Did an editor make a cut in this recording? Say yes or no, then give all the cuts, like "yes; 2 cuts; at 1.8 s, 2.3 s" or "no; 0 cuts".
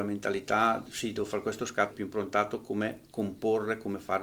yes; 1 cut; at 1.9 s